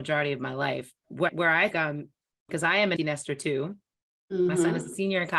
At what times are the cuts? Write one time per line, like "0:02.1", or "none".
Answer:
0:01.0
0:01.3
0:01.7
0:02.5
0:03.0